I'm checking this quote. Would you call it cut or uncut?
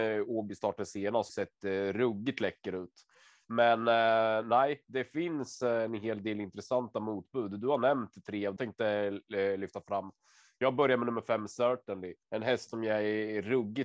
cut